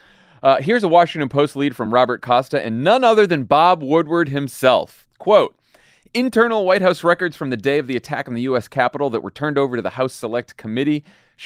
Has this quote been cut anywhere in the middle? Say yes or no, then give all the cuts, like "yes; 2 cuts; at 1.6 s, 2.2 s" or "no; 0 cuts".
no; 0 cuts